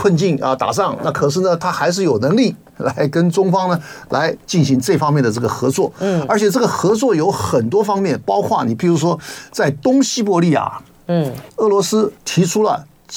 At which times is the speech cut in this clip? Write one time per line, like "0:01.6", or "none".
0:11.5
0:12.2